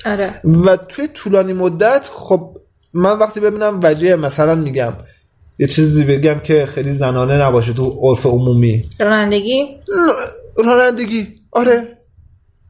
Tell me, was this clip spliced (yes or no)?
no